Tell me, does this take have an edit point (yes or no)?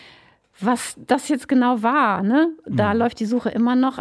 no